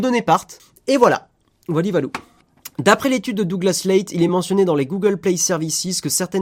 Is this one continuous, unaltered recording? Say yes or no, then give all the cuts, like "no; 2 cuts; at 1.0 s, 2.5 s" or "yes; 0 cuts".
yes; 0 cuts